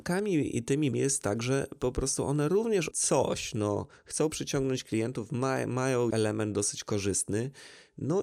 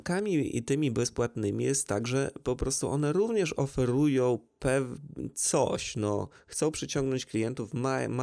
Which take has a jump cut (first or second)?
first